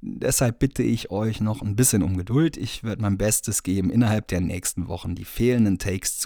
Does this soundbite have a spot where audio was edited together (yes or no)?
no